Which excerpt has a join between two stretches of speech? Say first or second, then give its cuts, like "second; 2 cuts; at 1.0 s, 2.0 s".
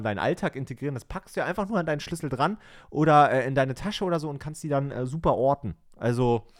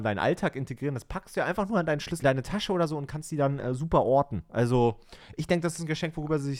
second; 2 cuts; at 2.2 s, 4.5 s